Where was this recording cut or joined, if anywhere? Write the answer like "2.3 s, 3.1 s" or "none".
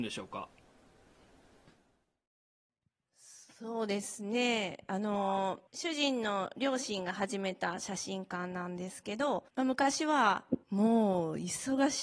5.7 s, 9.5 s, 10.6 s

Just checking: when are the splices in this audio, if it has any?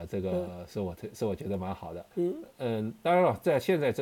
2.1 s

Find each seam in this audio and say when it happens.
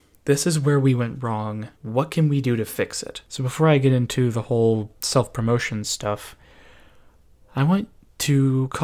1.7 s, 3.2 s, 5.0 s

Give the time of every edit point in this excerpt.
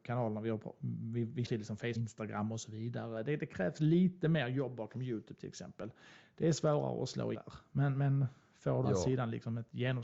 1.4 s, 1.9 s, 7.3 s, 8.8 s

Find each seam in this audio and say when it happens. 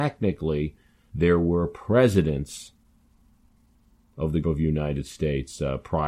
4.4 s

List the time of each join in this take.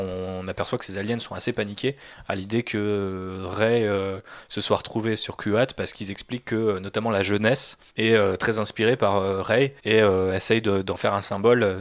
7.9 s, 9.8 s

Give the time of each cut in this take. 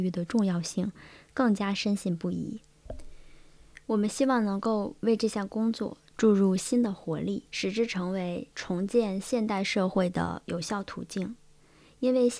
7.5 s, 8.5 s

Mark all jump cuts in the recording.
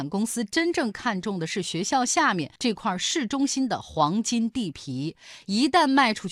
2.6 s

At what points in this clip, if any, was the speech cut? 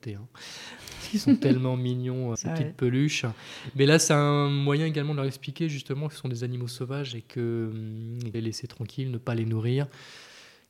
2.3 s, 8.3 s

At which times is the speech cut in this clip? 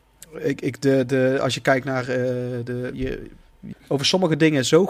2.9 s, 3.7 s

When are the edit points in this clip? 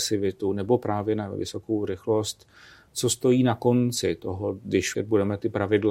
4.9 s

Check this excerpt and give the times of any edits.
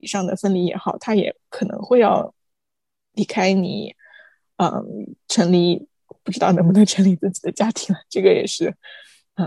none

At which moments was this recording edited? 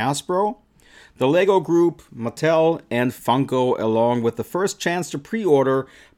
none

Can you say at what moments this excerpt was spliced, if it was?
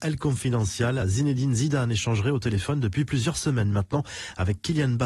none

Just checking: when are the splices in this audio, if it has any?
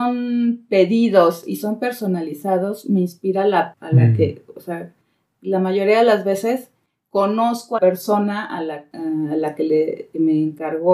3.7 s, 7.8 s

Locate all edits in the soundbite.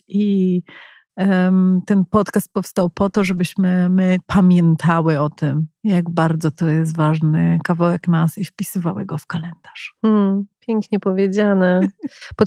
4.2 s

